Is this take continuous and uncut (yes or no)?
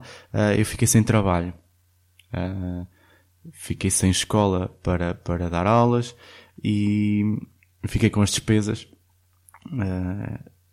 yes